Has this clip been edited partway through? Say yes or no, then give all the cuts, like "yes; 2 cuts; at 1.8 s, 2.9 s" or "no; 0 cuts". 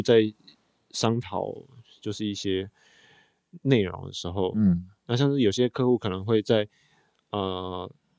no; 0 cuts